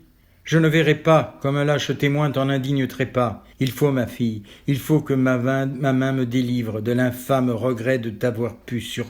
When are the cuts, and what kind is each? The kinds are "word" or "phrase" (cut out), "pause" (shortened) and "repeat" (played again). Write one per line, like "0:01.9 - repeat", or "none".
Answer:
0:03.5 - pause